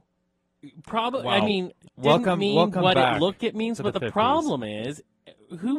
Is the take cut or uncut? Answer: cut